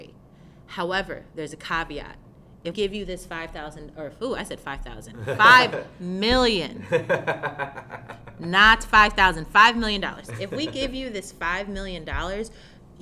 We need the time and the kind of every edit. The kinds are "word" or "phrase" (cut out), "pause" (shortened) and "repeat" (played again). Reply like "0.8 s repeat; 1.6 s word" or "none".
2.7 s word